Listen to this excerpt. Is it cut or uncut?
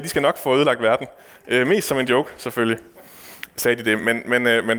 uncut